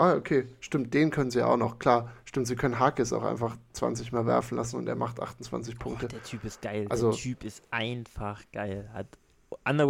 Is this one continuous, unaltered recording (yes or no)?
yes